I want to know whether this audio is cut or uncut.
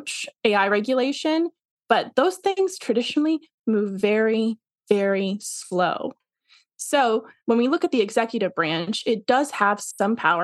uncut